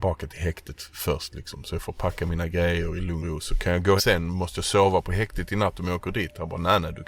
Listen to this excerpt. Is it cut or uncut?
cut